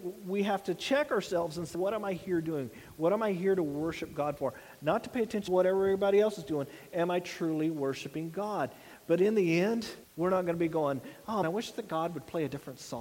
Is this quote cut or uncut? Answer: cut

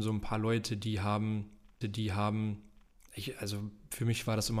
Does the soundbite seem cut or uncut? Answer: cut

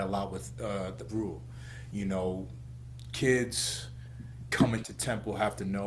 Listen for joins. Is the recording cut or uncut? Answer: cut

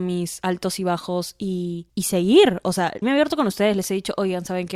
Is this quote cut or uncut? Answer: cut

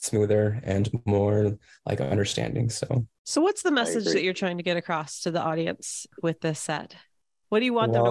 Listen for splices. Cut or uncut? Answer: uncut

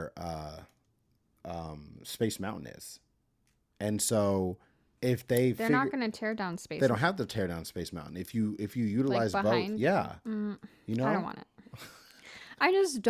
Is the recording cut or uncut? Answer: uncut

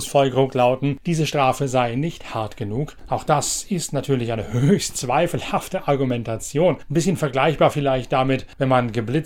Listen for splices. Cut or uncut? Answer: uncut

